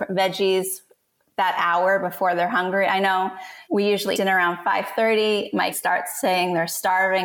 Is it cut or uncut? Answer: cut